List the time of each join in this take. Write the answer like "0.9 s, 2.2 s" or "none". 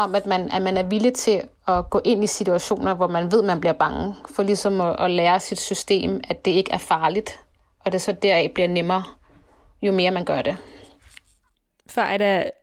none